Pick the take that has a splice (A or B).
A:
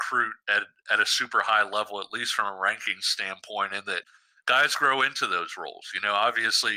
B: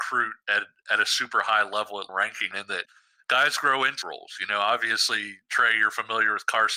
B